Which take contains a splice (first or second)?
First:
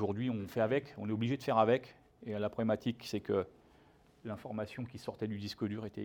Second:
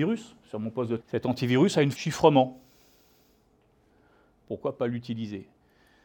second